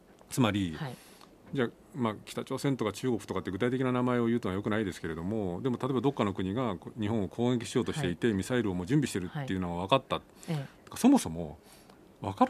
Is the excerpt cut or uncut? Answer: uncut